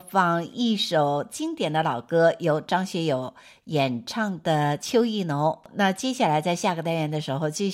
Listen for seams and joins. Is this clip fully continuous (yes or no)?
yes